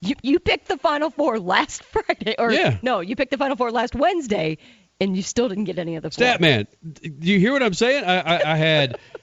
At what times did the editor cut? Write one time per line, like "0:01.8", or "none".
none